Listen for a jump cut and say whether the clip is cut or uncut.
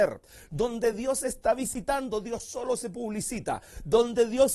uncut